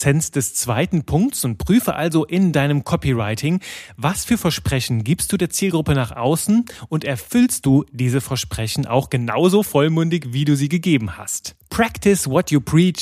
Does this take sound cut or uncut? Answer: uncut